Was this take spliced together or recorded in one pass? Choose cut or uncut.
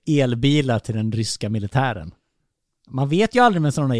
uncut